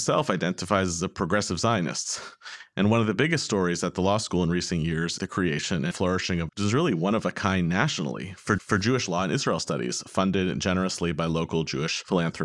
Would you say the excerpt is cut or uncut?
cut